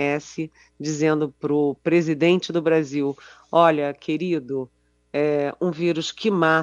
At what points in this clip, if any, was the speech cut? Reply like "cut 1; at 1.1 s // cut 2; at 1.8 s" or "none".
none